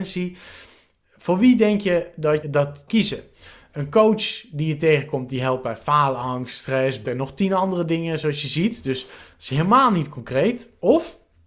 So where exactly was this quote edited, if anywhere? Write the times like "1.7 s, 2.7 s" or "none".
2.4 s, 2.9 s, 7.0 s